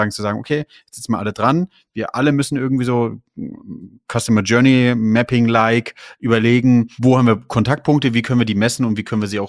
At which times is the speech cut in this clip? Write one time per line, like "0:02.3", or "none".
none